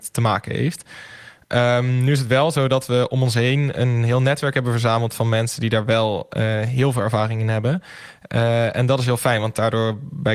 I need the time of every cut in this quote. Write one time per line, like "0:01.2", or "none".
none